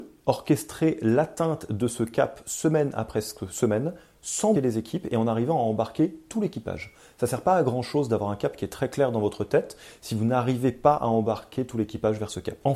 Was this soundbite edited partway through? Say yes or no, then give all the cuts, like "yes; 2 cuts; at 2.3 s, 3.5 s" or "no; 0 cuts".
yes; 1 cut; at 4.5 s